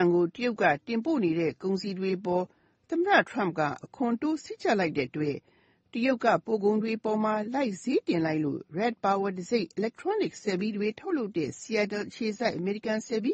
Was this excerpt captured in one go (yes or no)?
yes